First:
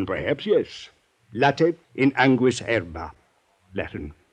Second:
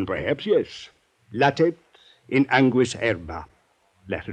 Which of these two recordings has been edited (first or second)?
first